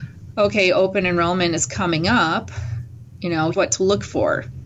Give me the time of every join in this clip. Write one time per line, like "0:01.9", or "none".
0:03.5